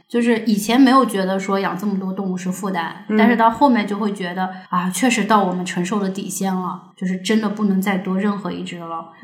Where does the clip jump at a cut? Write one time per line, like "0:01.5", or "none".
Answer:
0:04.7
0:06.9